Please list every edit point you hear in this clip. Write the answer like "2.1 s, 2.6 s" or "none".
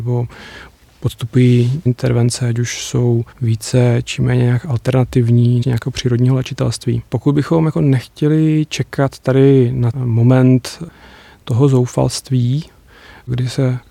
1.9 s, 3.3 s, 5.6 s, 7.1 s, 9.9 s